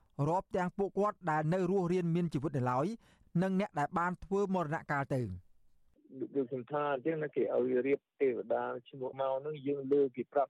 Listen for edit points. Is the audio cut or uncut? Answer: cut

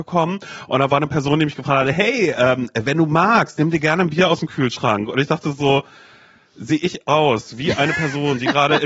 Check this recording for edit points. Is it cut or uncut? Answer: uncut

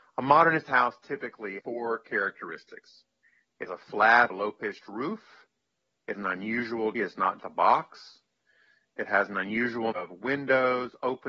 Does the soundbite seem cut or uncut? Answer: cut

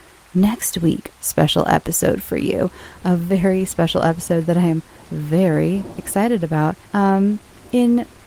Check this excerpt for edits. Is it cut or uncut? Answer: cut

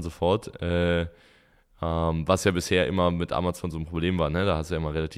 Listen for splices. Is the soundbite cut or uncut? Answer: uncut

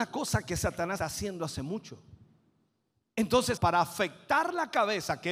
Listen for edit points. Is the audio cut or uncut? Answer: cut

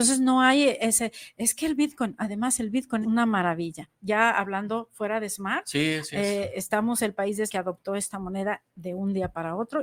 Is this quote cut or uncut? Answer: cut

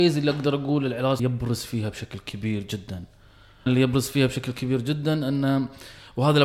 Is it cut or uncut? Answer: cut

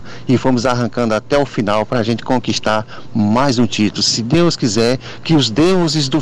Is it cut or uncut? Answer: uncut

